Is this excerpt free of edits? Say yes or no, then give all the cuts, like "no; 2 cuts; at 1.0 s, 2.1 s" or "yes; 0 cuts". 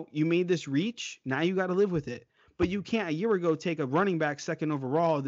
yes; 0 cuts